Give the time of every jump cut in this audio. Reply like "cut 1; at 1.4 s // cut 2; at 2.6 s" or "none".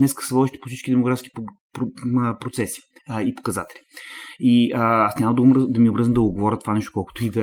none